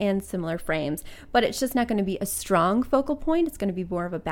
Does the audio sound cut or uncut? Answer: uncut